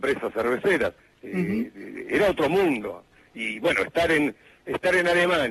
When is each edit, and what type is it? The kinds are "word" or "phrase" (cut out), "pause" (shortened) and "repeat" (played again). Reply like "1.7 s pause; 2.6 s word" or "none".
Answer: none